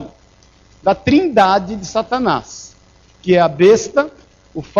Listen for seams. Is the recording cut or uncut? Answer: uncut